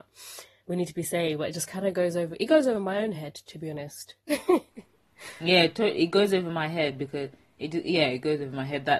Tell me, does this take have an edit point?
no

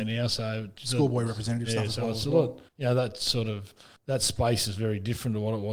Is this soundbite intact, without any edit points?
no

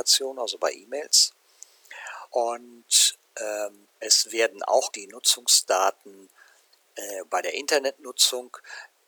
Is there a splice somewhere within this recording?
yes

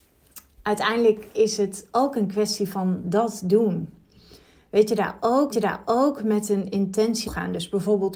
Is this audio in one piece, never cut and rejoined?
no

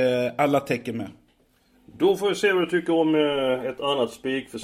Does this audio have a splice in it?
no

